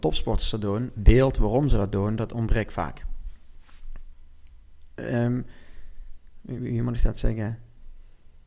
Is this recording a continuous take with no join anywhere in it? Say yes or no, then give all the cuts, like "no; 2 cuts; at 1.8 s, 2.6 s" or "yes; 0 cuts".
no; 1 cut; at 1.0 s